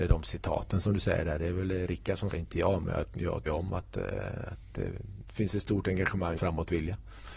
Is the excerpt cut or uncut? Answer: cut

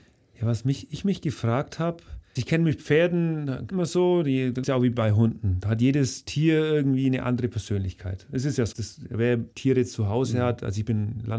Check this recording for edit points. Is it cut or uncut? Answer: cut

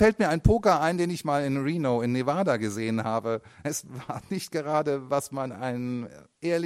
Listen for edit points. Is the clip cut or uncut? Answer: uncut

